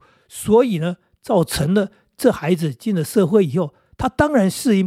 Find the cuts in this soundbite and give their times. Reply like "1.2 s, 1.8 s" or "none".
none

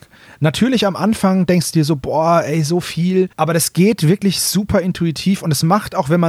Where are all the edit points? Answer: 3.3 s

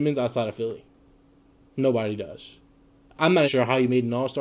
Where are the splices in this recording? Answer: 3.4 s

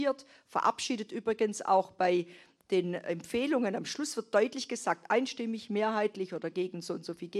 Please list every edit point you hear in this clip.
none

